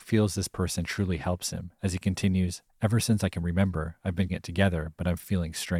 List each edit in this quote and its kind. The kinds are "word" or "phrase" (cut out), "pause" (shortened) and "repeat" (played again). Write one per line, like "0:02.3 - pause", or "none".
0:04.3 - word